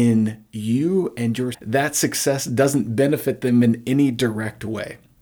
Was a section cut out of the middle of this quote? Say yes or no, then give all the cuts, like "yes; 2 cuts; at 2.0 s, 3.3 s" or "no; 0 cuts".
yes; 1 cut; at 1.5 s